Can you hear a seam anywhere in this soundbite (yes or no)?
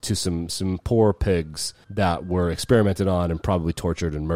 yes